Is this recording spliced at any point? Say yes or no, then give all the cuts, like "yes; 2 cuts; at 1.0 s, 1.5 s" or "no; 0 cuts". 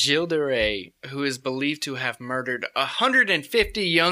no; 0 cuts